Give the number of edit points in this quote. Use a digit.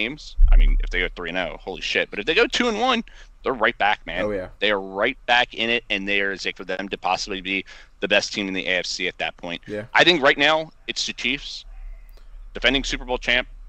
1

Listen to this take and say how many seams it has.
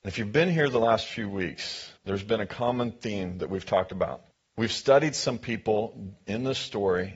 2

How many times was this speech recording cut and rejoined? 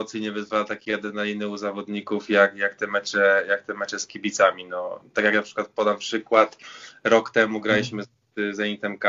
0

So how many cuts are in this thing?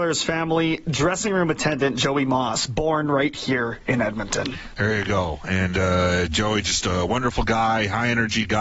0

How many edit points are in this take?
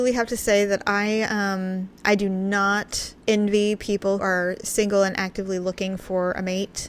3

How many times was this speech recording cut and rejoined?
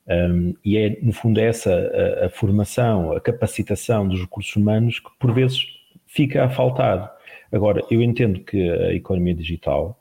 0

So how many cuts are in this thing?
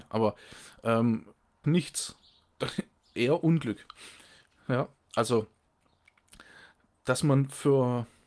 1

